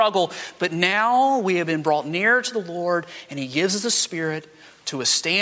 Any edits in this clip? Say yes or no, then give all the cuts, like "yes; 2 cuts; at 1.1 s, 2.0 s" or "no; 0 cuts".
no; 0 cuts